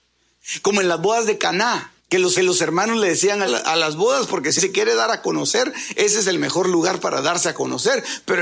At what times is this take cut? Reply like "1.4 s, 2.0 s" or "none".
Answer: 2.0 s, 2.4 s, 3.5 s, 4.6 s